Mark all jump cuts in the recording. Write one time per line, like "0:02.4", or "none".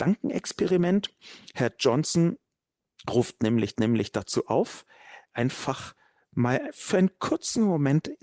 0:03.7